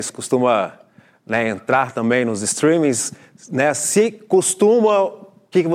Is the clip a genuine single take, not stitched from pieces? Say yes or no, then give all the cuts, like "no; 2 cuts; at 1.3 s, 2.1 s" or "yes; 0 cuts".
yes; 0 cuts